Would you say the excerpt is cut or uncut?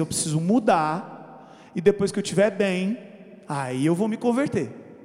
uncut